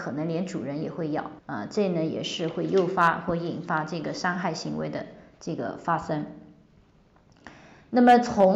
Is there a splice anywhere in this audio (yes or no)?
yes